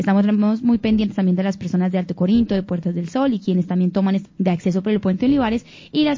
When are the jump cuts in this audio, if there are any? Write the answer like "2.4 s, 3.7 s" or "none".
4.3 s